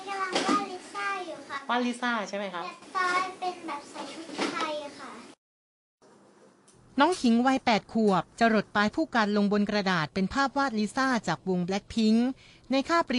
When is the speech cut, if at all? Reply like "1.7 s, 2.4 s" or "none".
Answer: 8.3 s